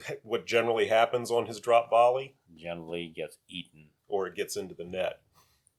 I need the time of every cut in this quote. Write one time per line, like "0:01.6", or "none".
0:02.4
0:04.0